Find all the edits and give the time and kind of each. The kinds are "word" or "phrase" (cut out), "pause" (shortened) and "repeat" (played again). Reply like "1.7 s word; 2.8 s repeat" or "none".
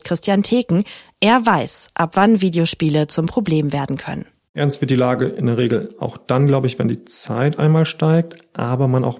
none

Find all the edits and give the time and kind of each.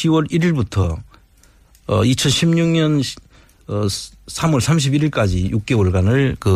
none

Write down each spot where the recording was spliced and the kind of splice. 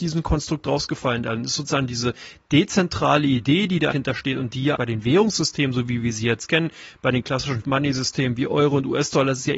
3.9 s word; 4.8 s word; 7.6 s word

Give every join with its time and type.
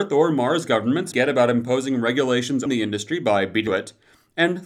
1.1 s word; 2.7 s word; 3.7 s phrase

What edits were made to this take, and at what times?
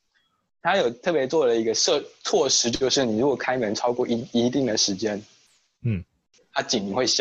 none

